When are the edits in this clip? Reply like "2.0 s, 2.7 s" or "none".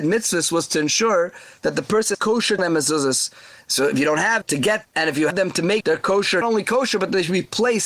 2.1 s, 2.6 s, 4.4 s, 4.8 s, 5.3 s, 5.8 s, 6.4 s

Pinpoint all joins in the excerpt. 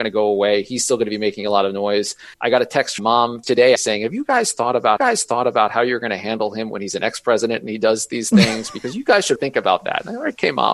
2.3 s, 3.0 s, 3.4 s, 3.8 s, 5.0 s, 9.4 s

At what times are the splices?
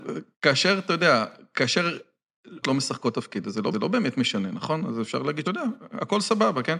2.6 s, 3.7 s, 5.4 s

